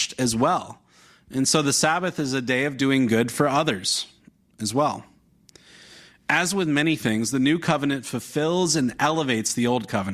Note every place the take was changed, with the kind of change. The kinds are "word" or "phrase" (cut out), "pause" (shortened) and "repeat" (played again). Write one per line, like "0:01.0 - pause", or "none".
none